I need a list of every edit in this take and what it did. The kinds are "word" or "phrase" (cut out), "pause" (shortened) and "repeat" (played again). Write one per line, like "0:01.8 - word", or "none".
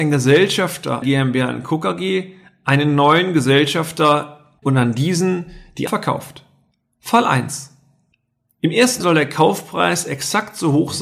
0:01.0 - word
0:04.6 - word
0:05.9 - word
0:09.0 - word